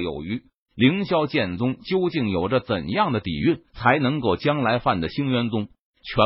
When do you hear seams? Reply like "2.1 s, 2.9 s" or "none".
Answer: 3.7 s